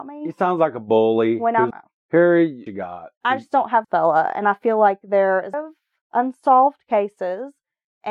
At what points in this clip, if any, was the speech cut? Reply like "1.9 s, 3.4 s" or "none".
1.7 s, 2.7 s, 3.8 s, 5.5 s